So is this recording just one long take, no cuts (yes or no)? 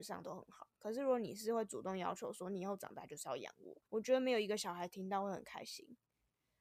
no